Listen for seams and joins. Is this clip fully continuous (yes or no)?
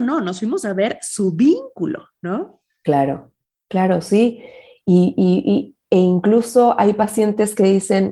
yes